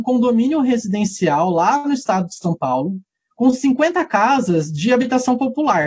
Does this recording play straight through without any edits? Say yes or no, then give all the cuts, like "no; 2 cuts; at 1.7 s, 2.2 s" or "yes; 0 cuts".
yes; 0 cuts